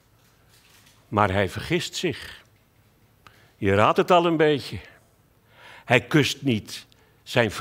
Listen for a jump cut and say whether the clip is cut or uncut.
uncut